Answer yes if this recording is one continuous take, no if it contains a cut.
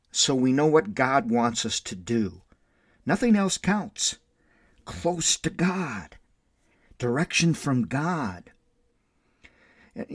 yes